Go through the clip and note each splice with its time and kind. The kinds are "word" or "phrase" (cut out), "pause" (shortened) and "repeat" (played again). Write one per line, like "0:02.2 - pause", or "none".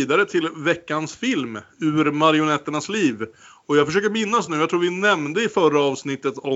none